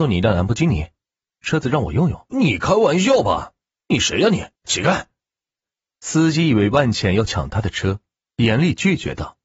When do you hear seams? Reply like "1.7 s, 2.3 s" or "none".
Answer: 2.3 s, 4.6 s